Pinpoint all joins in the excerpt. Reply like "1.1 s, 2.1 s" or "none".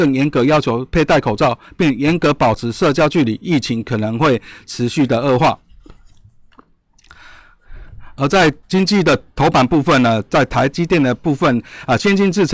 8.6 s